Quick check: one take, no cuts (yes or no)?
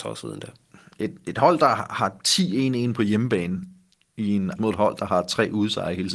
no